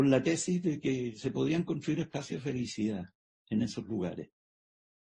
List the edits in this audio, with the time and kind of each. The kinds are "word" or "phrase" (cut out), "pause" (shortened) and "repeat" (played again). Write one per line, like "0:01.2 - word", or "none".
none